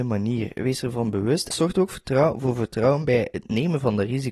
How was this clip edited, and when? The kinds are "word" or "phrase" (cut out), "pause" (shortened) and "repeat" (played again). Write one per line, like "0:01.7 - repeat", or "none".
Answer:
0:01.5 - word